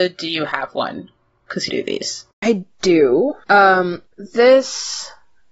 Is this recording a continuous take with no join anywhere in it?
no; 2 cuts; at 1.7 s, 4.1 s

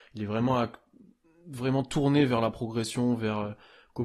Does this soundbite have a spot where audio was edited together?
no; 0 cuts

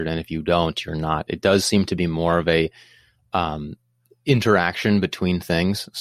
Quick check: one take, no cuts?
yes; 0 cuts

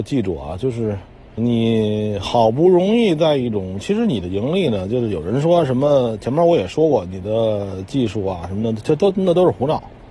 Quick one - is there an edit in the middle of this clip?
yes; 1 cut; at 1.4 s

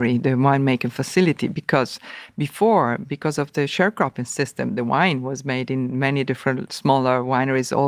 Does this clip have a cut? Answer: no; 0 cuts

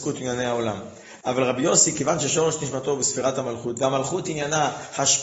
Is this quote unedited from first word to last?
yes; 0 cuts

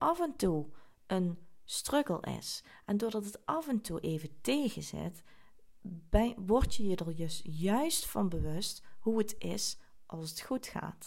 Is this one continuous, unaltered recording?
yes; 0 cuts

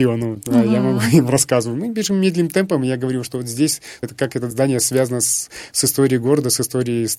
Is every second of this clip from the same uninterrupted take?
no; 1 cut; at 4.0 s

